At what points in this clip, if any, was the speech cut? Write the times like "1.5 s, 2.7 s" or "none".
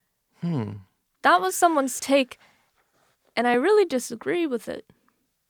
none